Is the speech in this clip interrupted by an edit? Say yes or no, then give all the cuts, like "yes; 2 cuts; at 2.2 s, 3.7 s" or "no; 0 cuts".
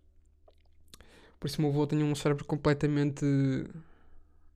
no; 0 cuts